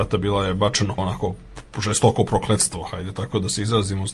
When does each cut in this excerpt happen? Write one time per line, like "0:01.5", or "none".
0:01.0